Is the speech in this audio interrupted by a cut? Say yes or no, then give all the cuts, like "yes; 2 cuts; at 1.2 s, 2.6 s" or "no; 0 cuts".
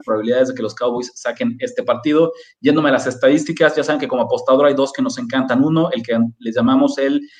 no; 0 cuts